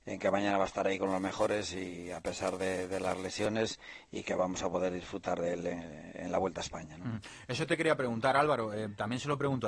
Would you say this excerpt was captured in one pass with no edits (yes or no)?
yes